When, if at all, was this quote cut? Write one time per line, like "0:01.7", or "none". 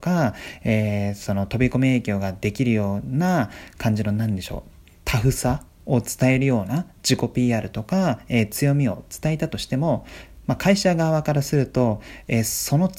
0:05.0

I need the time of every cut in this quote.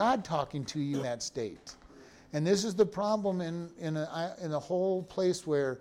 0:01.0

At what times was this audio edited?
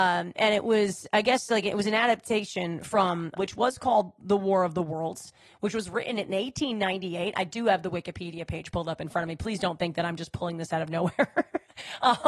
0:03.4

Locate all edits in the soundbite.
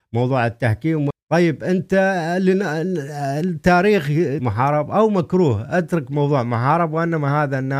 0:01.1
0:04.4

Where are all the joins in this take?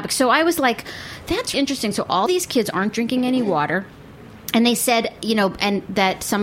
0:01.5
0:02.3

